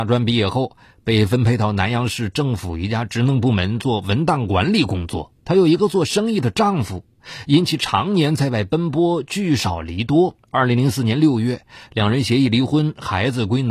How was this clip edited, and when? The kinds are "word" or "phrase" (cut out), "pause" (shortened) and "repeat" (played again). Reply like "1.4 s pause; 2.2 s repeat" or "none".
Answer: 5.4 s pause; 10.4 s pause